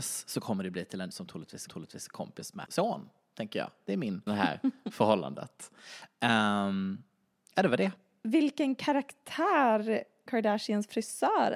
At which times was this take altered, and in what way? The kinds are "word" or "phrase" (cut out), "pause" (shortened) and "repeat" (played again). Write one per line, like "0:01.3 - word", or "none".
0:01.1 - phrase
0:01.7 - repeat
0:02.7 - word
0:04.3 - phrase
0:10.3 - word